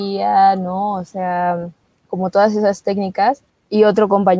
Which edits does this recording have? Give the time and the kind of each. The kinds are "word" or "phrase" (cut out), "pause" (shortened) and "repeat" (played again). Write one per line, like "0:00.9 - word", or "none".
0:01.9 - pause
0:03.5 - pause